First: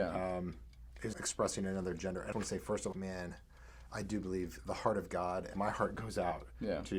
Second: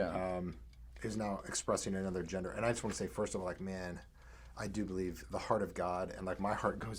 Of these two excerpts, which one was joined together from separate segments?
first; 4 cuts; at 1.1 s, 2.3 s, 2.9 s, 5.5 s

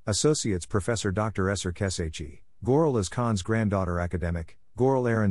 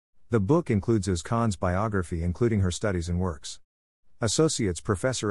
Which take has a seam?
second; 1 cut; at 2.7 s

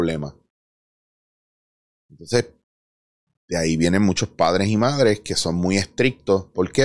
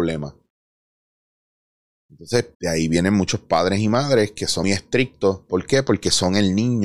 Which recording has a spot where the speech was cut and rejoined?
second; 2 cuts; at 2.5 s, 4.6 s

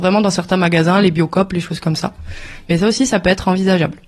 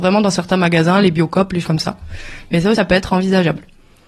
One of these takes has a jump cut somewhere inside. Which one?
second; 2 cuts; at 1.6 s, 2.7 s

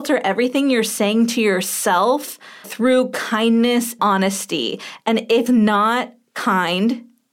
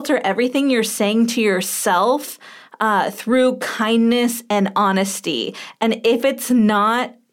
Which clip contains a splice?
first; 3 cuts; at 2.6 s, 4.0 s, 5.5 s

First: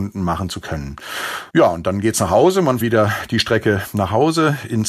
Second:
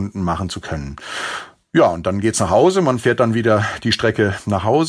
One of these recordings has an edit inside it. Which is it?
first; 2 cuts; at 1.5 s, 2.8 s

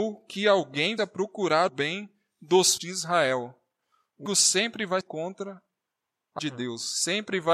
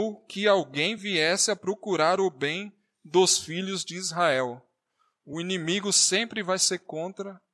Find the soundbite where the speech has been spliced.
first; 6 cuts; at 1.0 s, 1.7 s, 2.8 s, 4.3 s, 5.0 s, 6.4 s

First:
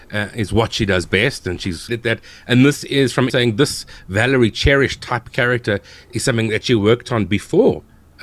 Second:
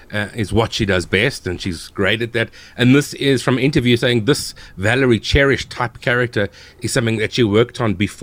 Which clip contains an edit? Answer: first; 2 cuts; at 1.9 s, 3.3 s

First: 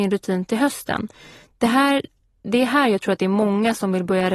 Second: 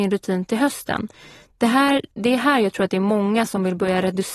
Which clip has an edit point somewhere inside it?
second; 1 cut; at 2.1 s

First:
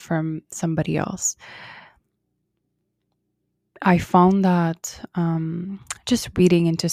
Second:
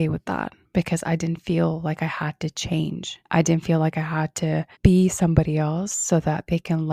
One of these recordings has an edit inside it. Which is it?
second; 2 cuts; at 3.2 s, 4.7 s

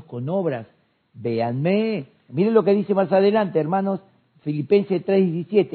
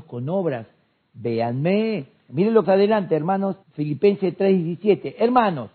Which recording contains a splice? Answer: second; 2 cuts; at 2.6 s, 3.6 s

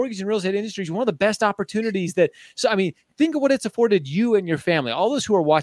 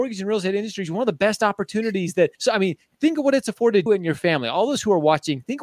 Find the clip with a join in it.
second; 2 cuts; at 2.3 s, 3.9 s

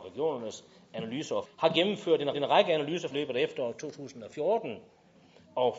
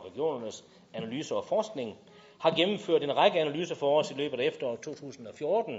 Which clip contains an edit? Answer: first; 3 cuts; at 1.5 s, 2.3 s, 3.1 s

